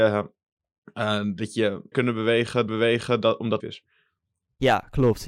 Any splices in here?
yes; 3 cuts; at 1.9 s, 2.7 s, 3.6 s

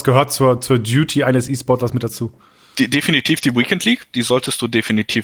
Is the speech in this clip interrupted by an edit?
no; 0 cuts

